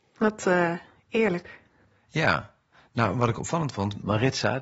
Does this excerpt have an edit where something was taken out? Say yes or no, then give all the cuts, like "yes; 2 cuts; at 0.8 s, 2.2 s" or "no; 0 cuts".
no; 0 cuts